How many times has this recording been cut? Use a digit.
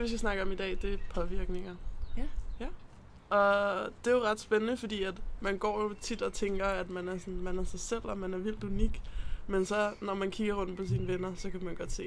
0